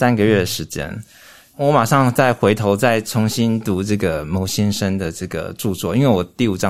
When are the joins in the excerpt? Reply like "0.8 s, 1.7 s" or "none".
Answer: none